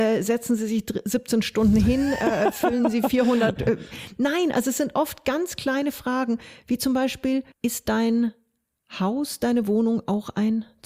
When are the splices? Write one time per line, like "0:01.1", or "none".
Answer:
0:07.5